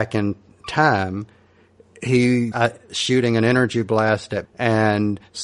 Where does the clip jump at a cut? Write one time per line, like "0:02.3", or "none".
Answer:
0:02.5
0:04.4